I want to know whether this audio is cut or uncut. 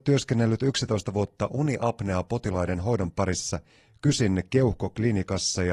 uncut